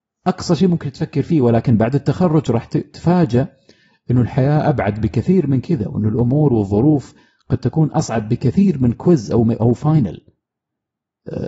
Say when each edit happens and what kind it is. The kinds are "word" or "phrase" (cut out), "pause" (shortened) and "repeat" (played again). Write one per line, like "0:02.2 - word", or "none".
none